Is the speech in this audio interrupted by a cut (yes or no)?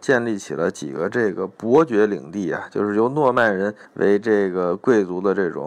yes